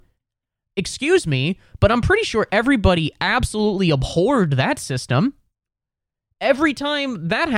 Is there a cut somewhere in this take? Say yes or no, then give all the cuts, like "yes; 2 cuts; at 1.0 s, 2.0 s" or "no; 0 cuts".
no; 0 cuts